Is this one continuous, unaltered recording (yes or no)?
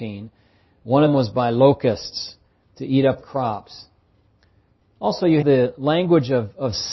no